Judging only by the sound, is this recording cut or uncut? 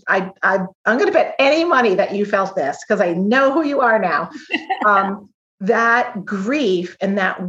uncut